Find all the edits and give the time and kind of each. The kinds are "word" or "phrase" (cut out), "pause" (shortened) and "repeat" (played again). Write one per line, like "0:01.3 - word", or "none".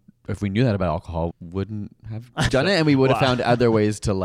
0:01.3 - word
0:02.5 - word